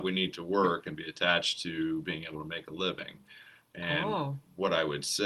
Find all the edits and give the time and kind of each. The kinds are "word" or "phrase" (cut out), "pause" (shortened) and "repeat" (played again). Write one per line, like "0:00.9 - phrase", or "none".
none